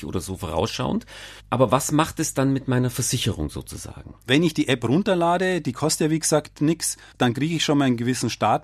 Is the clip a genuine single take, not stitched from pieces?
yes; 0 cuts

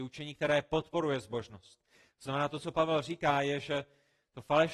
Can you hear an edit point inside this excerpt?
no; 0 cuts

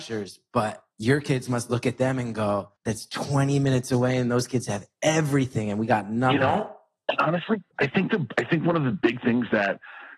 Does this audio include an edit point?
yes; 3 cuts; at 0.9 s, 2.8 s, 7.7 s

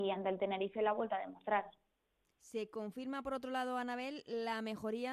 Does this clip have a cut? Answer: no; 0 cuts

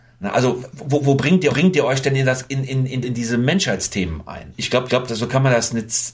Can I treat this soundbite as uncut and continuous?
no; 3 cuts; at 1.5 s, 3.0 s, 4.9 s

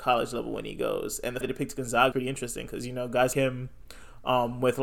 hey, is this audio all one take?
no; 3 cuts; at 1.4 s, 2.1 s, 3.3 s

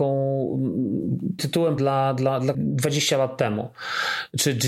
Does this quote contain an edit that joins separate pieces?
yes; 3 cuts; at 1.4 s, 1.8 s, 2.5 s

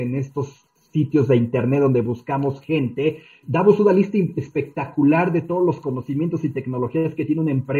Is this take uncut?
no; 1 cut; at 3.4 s

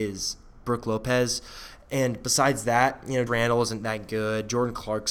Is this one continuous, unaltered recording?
no; 1 cut; at 3.3 s

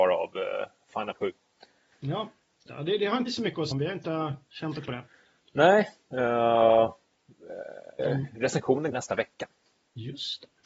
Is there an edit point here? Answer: yes; 7 cuts; at 1.1 s, 2.7 s, 3.3 s, 3.7 s, 4.9 s, 8.0 s, 8.9 s

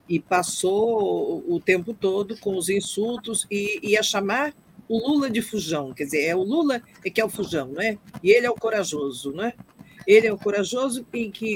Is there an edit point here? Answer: no; 0 cuts

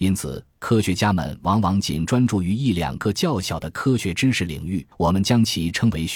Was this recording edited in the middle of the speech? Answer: yes; 1 cut; at 4.9 s

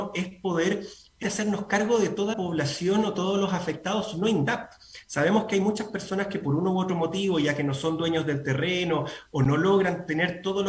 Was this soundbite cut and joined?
yes; 2 cuts; at 1.2 s, 2.3 s

